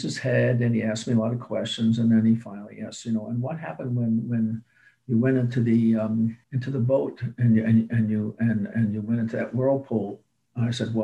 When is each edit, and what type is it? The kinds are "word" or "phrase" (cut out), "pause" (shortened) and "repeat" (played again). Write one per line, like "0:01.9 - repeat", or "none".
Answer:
0:06.4 - pause